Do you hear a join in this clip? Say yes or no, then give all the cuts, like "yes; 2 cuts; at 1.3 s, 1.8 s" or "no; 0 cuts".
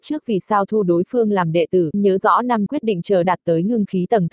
yes; 3 cuts; at 1.9 s, 2.7 s, 3.2 s